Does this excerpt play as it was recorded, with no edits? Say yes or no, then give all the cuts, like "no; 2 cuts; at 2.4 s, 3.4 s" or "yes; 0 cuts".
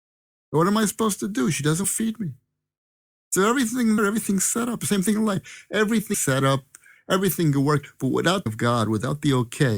no; 4 cuts; at 1.8 s, 4.0 s, 6.1 s, 8.5 s